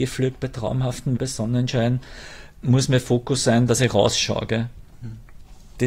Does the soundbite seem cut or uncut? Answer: cut